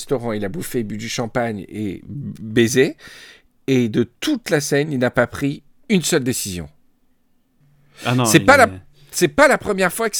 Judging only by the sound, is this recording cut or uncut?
uncut